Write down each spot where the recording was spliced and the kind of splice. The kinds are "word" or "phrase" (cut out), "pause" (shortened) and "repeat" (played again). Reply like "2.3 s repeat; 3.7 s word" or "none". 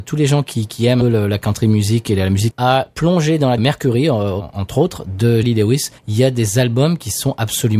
1.0 s phrase; 2.5 s word; 3.6 s word; 5.4 s word; 6.0 s pause